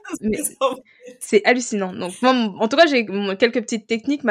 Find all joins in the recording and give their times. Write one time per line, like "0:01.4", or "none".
none